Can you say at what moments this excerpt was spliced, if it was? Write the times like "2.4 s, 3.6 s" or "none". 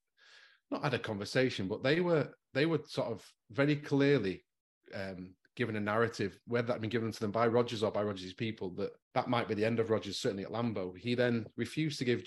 9.0 s

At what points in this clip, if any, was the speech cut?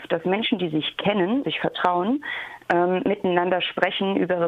1.4 s

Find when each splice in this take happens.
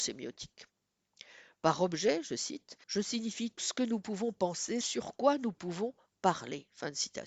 2.8 s, 3.6 s, 4.8 s

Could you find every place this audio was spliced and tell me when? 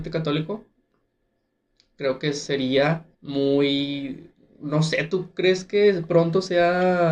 3.1 s

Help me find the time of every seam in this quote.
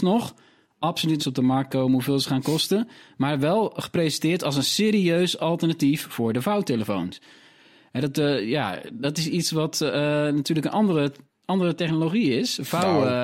1.2 s

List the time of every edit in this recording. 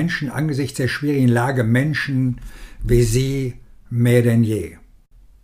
none

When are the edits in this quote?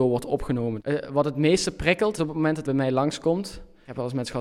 2.2 s, 2.6 s

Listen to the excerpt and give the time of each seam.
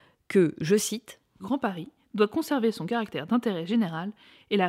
1.4 s

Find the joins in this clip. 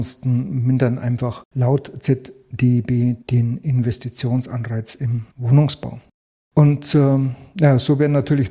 3.2 s, 5.3 s

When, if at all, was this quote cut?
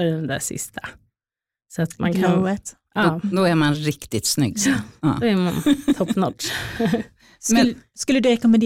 none

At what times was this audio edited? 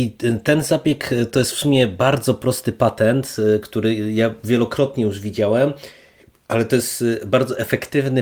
none

